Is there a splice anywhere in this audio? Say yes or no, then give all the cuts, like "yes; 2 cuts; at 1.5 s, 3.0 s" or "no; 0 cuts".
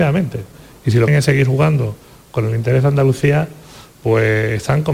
yes; 1 cut; at 1.1 s